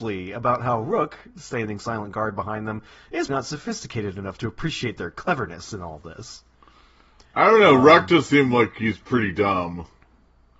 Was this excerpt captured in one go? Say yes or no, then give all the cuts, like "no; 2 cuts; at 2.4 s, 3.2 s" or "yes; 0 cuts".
no; 1 cut; at 3.3 s